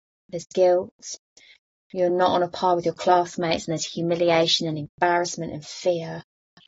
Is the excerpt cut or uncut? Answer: uncut